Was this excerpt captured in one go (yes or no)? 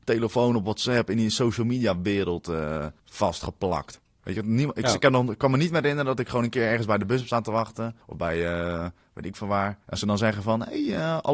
no